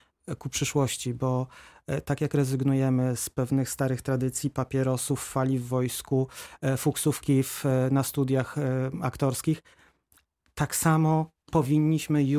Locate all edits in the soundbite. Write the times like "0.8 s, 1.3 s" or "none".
none